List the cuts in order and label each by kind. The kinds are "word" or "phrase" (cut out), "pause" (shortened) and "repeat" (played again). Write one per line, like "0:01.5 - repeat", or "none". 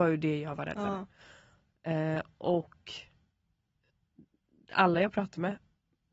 none

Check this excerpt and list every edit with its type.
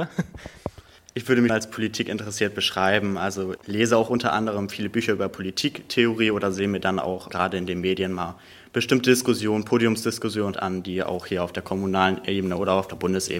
0:01.5 - word
0:03.6 - word
0:07.3 - word
0:10.5 - word

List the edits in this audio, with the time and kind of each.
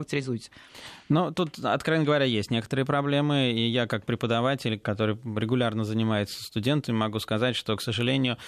0:04.8 - word

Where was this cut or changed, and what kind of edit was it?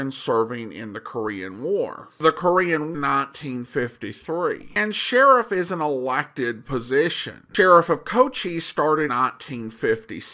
0:02.9 - phrase
0:09.1 - word

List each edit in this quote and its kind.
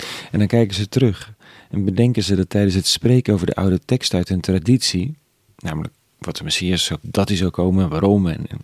0:07.0 - word

